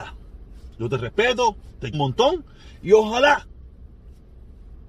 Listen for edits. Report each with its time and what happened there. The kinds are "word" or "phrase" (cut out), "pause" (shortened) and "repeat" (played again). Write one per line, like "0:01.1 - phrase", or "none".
0:01.9 - word